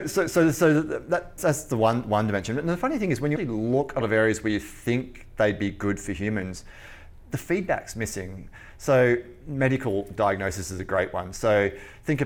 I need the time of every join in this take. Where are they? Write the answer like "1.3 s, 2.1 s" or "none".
1.4 s, 3.4 s, 4.0 s